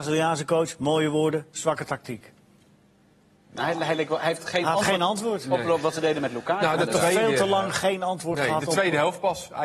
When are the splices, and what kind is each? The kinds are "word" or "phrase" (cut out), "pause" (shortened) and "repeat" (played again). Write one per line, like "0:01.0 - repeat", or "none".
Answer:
none